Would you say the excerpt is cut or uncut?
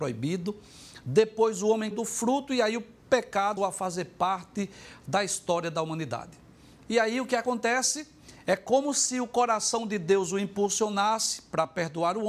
cut